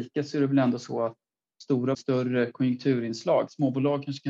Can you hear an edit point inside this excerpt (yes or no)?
yes